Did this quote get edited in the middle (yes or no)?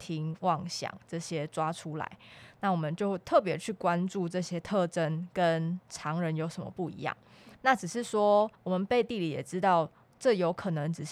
yes